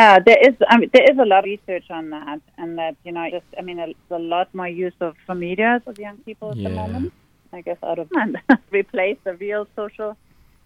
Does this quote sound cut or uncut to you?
cut